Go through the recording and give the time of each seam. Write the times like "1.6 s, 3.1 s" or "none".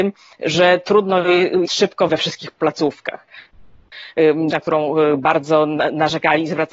1.7 s, 2.1 s, 4.5 s